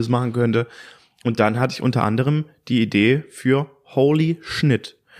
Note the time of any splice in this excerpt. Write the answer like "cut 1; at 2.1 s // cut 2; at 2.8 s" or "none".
none